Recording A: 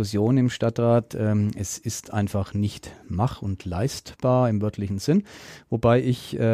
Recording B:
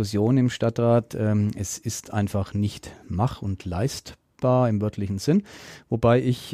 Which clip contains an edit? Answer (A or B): A